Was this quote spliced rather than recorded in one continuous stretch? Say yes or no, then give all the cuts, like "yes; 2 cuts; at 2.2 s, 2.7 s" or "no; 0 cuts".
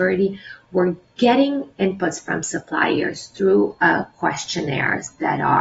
no; 0 cuts